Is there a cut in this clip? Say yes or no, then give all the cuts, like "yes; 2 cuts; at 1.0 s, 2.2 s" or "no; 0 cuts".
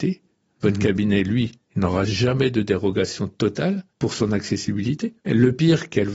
yes; 2 cuts; at 3.9 s, 5.2 s